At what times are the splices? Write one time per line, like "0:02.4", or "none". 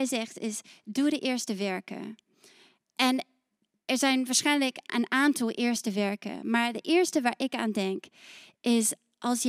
none

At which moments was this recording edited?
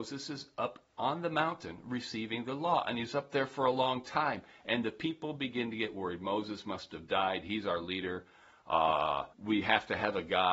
0:09.3

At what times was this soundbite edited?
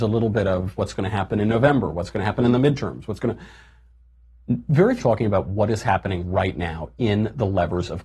0:05.0

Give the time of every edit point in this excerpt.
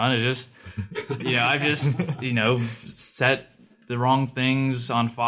none

